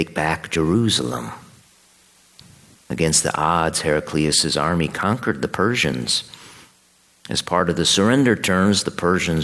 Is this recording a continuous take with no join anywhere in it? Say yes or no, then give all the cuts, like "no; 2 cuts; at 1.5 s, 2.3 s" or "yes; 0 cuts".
yes; 0 cuts